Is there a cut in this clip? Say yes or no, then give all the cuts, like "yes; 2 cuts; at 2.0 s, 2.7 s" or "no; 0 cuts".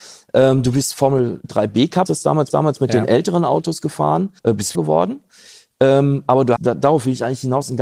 yes; 6 cuts; at 1.4 s, 2.1 s, 2.5 s, 4.4 s, 4.7 s, 6.6 s